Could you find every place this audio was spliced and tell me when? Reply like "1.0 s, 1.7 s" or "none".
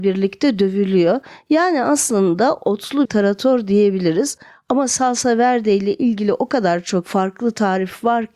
3.1 s